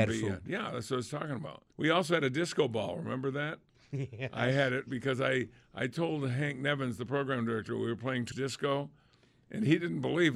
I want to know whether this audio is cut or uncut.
cut